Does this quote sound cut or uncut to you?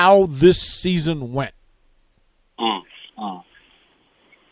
cut